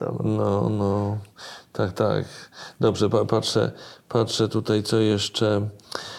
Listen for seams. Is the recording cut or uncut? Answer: uncut